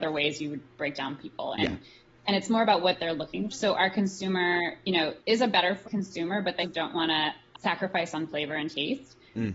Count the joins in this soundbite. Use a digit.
6